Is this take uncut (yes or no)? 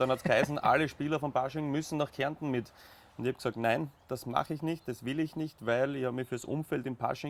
yes